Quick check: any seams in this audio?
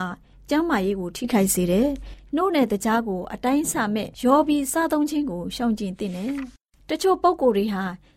yes; 1 cut; at 4.1 s

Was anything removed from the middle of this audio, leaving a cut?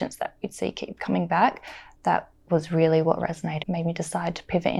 yes; 1 cut; at 3.6 s

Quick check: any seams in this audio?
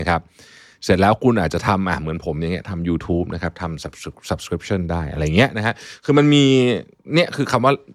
no; 0 cuts

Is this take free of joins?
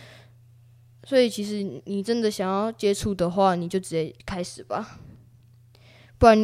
no; 1 cut; at 4.2 s

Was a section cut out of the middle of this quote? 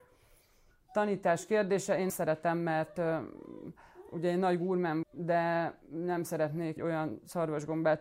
yes; 3 cuts; at 2.1 s, 5.0 s, 6.8 s

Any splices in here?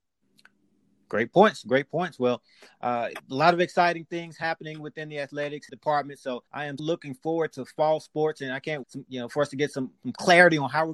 yes; 5 cuts; at 3.1 s, 5.7 s, 6.5 s, 6.8 s, 8.8 s

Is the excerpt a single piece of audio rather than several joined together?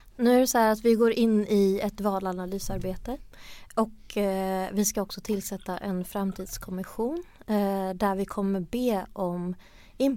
yes; 0 cuts

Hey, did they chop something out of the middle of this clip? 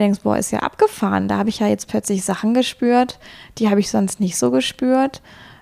no; 0 cuts

